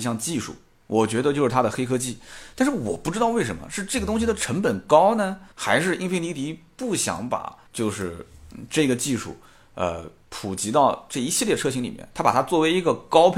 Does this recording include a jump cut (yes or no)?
yes